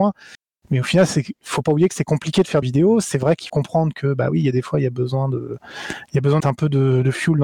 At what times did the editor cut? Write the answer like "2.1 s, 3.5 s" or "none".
2.6 s, 3.5 s, 6.4 s